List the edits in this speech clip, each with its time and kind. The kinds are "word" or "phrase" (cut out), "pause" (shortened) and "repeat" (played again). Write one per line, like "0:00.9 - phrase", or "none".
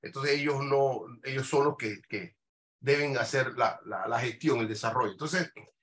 none

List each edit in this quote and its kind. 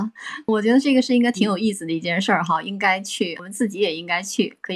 none

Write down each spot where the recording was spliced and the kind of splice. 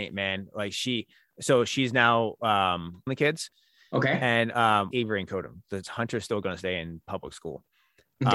0:03.1 - phrase
0:04.9 - phrase
0:05.8 - phrase

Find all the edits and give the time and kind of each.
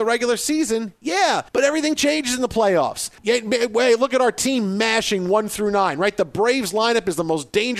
0:01.5 - pause
0:03.2 - pause

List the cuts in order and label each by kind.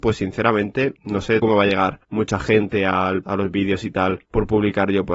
0:01.0 - pause
0:01.4 - word
0:02.0 - pause
0:03.2 - word
0:04.3 - pause

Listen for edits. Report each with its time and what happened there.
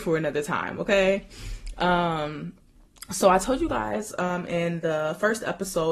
none

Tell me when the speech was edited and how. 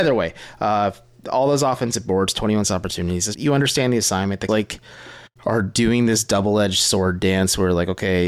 0:02.6 - phrase
0:03.3 - word
0:04.5 - word
0:05.3 - pause

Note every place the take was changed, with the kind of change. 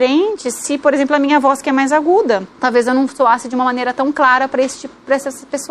0:02.5 - pause

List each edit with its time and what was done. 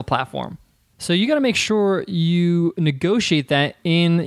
none

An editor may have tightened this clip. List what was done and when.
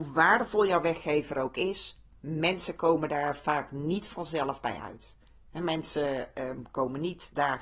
none

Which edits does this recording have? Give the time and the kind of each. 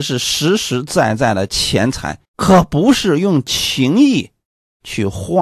0:02.2 - pause

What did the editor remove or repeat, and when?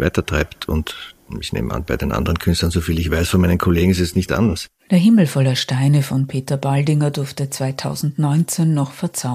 none

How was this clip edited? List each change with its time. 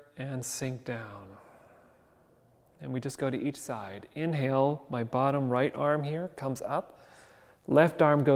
none

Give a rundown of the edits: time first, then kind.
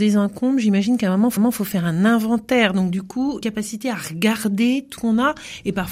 0:01.4 - repeat
0:03.4 - word
0:05.0 - word

